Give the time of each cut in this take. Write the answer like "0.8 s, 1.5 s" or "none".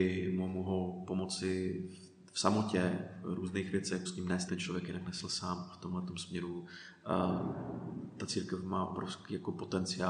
4.0 s, 4.5 s